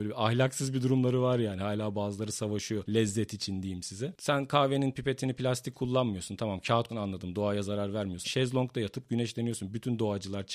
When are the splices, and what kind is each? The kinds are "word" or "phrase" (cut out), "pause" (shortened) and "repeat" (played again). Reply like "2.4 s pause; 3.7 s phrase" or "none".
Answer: 6.9 s word; 8.2 s word